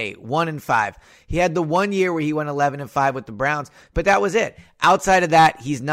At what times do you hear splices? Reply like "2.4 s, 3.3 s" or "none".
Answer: none